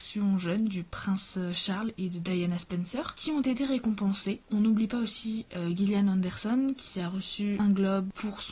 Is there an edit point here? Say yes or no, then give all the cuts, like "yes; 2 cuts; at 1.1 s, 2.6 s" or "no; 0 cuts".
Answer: no; 0 cuts